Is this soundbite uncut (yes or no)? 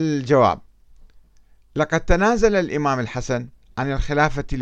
yes